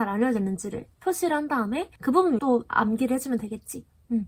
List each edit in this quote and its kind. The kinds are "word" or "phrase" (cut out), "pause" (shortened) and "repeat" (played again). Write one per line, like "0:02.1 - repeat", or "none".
0:02.0 - pause
0:02.4 - word